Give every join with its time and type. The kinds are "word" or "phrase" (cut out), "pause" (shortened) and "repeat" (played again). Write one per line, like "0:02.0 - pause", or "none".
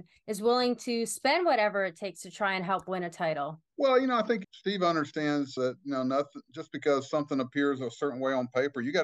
0:03.7 - pause
0:04.4 - word
0:05.6 - word